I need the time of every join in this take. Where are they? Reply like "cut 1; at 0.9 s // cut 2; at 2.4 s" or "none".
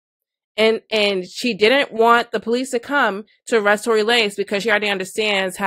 none